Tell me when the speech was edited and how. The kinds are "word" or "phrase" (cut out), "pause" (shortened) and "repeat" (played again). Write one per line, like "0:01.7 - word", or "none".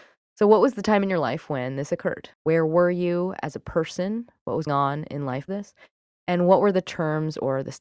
0:02.3 - pause
0:04.7 - word
0:05.5 - word